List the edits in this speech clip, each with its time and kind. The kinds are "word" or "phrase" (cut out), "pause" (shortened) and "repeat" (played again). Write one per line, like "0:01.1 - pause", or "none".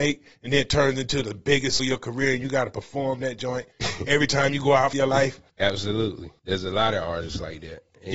0:01.8 - word
0:03.7 - pause
0:04.9 - phrase
0:05.5 - pause